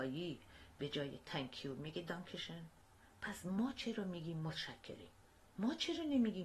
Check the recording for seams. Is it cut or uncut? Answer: uncut